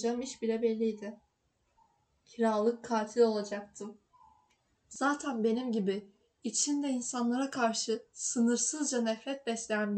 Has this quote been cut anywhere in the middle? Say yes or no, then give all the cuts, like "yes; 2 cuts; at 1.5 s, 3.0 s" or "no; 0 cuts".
no; 0 cuts